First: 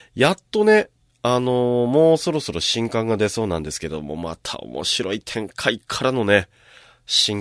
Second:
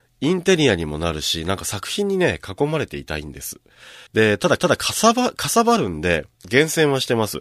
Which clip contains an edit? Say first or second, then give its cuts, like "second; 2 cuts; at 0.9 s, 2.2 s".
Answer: second; 3 cuts; at 4.1 s, 4.6 s, 6.3 s